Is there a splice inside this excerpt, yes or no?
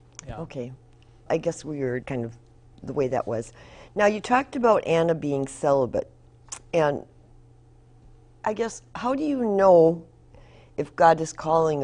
yes